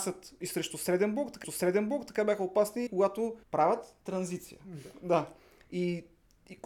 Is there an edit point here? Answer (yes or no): yes